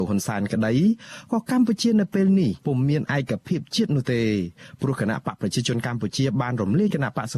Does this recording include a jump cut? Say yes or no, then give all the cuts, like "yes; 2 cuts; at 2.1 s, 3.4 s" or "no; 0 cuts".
yes; 1 cut; at 2.6 s